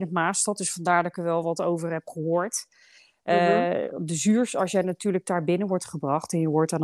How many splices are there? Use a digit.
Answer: 0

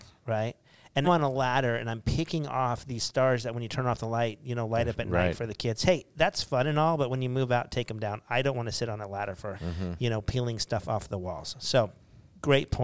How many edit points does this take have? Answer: 2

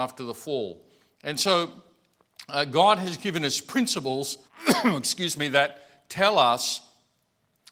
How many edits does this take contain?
1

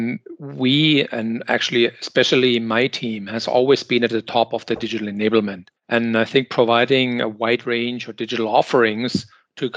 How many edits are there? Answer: 1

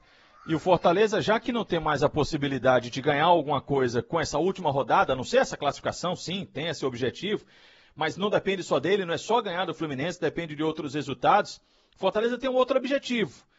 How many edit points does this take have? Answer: 0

